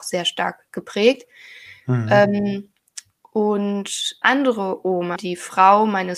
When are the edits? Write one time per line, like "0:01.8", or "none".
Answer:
0:04.2
0:05.2